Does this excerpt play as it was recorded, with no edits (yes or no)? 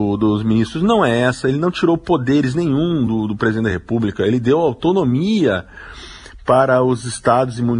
yes